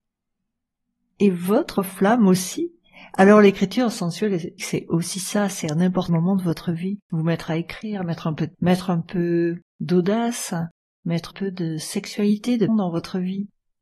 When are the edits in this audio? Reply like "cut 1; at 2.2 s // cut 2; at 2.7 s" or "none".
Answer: cut 1; at 1.8 s // cut 2; at 4.6 s // cut 3; at 6.1 s // cut 4; at 7.0 s // cut 5; at 8.5 s // cut 6; at 9.7 s // cut 7; at 11.3 s // cut 8; at 12.7 s